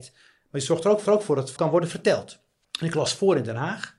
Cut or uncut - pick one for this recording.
cut